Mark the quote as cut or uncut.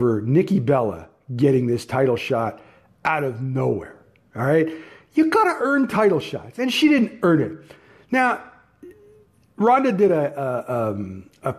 uncut